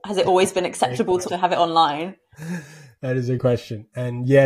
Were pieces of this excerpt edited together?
yes; 2 cuts; at 1.3 s, 3.4 s

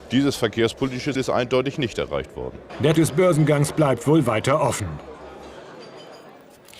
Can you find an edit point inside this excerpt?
yes; 2 cuts; at 1.2 s, 3.0 s

